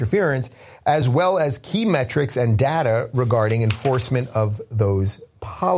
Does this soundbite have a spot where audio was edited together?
no; 0 cuts

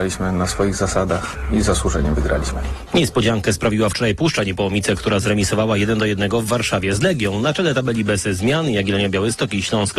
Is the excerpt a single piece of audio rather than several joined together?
yes; 0 cuts

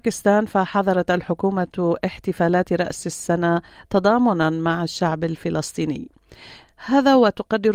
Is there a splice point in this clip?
no; 0 cuts

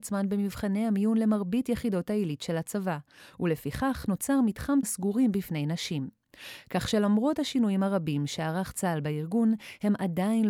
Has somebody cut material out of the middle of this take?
yes; 1 cut; at 4.8 s

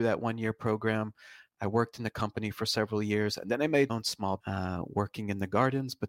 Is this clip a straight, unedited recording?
no; 2 cuts; at 3.9 s, 4.4 s

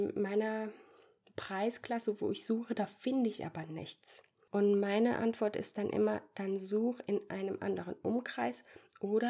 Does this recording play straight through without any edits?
yes; 0 cuts

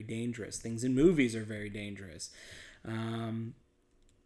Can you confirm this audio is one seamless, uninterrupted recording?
yes; 0 cuts

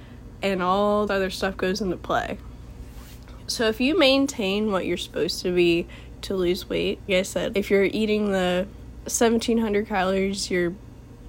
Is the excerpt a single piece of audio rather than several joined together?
no; 4 cuts; at 1.1 s, 6.2 s, 7.1 s, 7.5 s

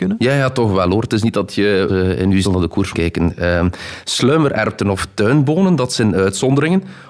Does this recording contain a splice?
yes; 3 cuts; at 1.9 s, 2.4 s, 2.9 s

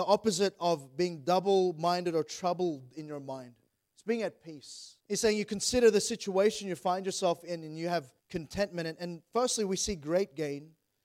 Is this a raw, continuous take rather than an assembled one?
no; 3 cuts; at 3.7 s, 5.0 s, 8.2 s

